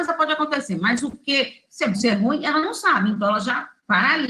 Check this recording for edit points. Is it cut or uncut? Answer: cut